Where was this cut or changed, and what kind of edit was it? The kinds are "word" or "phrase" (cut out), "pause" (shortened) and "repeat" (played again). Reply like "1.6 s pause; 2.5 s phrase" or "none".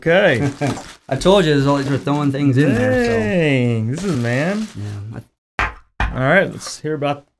1.9 s word; 4.1 s word; 5.4 s pause